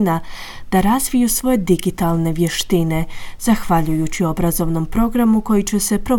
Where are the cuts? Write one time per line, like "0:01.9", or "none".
none